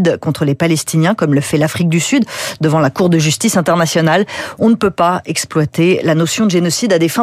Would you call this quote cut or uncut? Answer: uncut